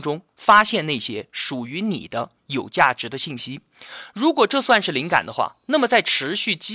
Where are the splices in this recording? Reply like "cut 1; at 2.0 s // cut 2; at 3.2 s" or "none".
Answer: none